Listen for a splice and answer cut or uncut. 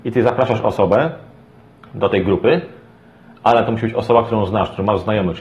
uncut